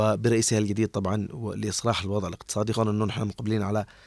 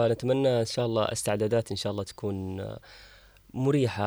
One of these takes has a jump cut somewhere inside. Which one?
first; 1 cut; at 2.7 s

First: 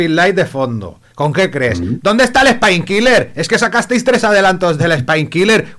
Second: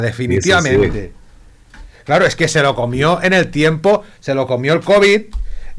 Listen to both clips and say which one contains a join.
first; 1 cut; at 1.1 s

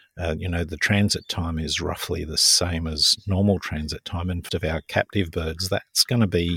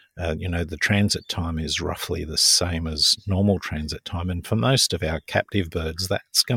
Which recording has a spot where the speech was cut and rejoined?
first; 1 cut; at 4.5 s

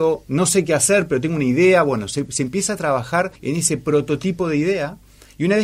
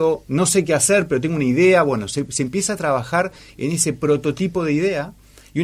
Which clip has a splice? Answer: first; 1 cut; at 3.4 s

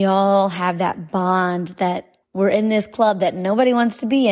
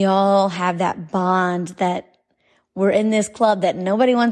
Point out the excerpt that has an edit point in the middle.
first; 1 cut; at 2.2 s

